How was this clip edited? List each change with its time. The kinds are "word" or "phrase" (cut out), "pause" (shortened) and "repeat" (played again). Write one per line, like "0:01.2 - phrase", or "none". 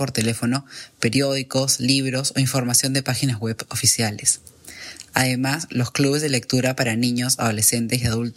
none